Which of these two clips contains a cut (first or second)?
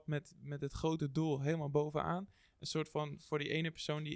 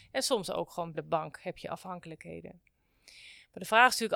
second